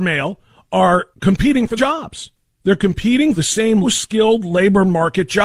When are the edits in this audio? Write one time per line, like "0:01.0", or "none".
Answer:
0:01.1
0:01.8
0:02.4
0:03.4
0:03.8